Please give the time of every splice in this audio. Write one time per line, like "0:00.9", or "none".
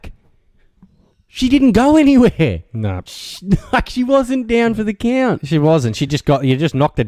none